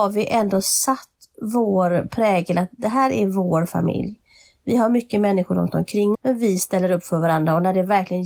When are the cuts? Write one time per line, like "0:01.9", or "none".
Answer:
0:06.1